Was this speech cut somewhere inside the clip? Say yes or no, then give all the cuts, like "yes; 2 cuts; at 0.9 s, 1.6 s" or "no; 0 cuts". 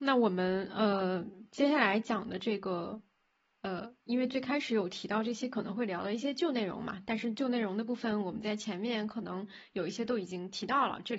no; 0 cuts